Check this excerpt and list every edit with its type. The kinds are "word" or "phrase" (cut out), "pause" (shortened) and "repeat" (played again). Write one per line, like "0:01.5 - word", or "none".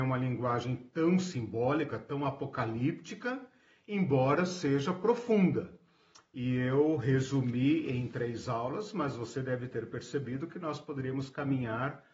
none